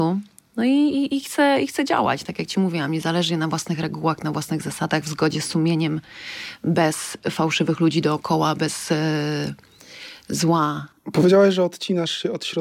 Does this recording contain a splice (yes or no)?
yes